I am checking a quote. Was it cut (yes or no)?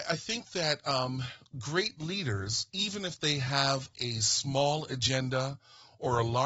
no